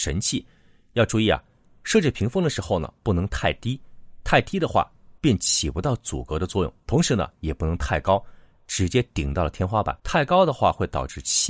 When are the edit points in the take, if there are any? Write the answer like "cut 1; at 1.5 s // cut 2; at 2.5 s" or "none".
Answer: cut 1; at 3.0 s // cut 2; at 5.2 s // cut 3; at 6.8 s // cut 4; at 7.3 s // cut 5; at 10.0 s